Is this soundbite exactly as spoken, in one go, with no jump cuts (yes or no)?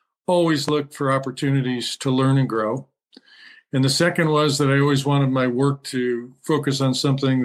yes